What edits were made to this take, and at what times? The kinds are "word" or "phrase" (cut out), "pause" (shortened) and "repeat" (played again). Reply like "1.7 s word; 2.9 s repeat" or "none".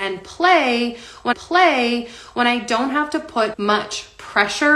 1.3 s repeat; 3.5 s word

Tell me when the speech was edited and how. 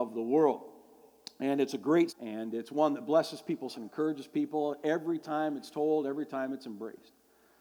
2.1 s word; 3.7 s word

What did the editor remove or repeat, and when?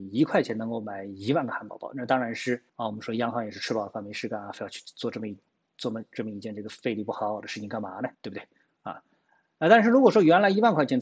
2.7 s pause; 8.1 s pause

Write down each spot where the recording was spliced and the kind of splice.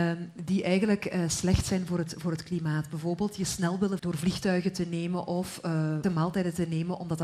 4.0 s word; 6.0 s word

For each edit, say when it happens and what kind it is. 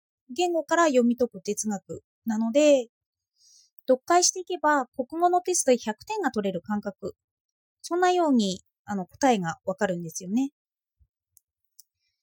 none

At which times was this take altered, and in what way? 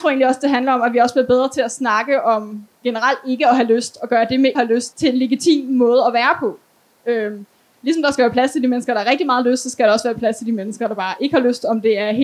4.5 s phrase; 4.9 s word

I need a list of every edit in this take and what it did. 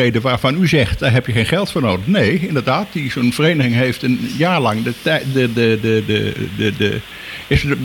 none

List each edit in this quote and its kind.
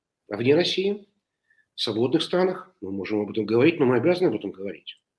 none

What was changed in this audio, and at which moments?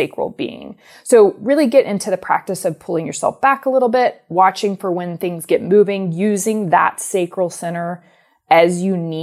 none

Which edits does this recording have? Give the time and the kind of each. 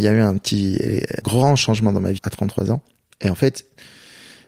1.2 s word; 2.2 s word

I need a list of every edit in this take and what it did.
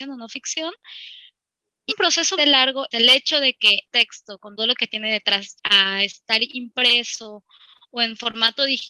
1.9 s word; 2.4 s word; 2.9 s word; 3.9 s word; 4.6 s word; 5.6 s word

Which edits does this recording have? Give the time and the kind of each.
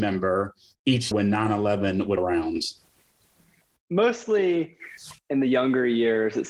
1.1 s word; 2.2 s word; 5.2 s word

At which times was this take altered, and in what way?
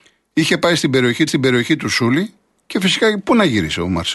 1.3 s repeat

